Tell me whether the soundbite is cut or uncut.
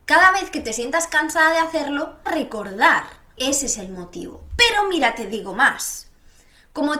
cut